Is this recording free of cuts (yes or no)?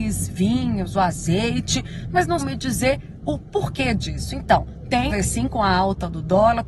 no